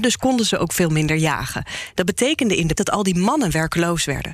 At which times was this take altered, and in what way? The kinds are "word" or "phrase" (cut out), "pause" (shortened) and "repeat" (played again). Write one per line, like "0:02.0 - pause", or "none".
0:02.8 - word